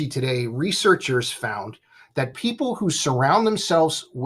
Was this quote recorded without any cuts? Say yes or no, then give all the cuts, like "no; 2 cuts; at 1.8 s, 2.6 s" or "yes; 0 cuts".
yes; 0 cuts